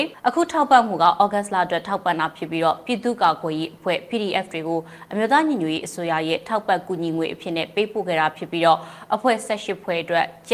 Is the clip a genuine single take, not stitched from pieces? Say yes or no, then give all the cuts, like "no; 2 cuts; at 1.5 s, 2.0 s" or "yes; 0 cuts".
yes; 0 cuts